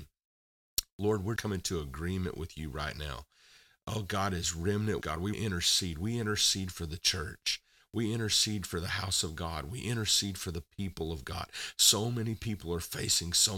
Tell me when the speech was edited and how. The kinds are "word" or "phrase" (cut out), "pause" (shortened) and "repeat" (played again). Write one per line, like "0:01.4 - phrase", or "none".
0:01.4 - word
0:05.0 - word
0:05.3 - word